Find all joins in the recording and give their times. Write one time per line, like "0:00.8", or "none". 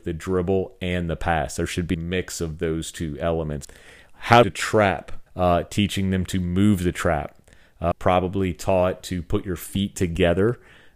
0:01.9
0:04.4
0:05.3
0:07.9

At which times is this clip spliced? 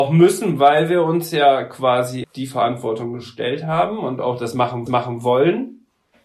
0:02.2
0:04.9

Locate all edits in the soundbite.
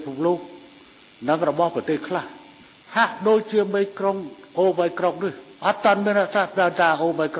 0:05.6

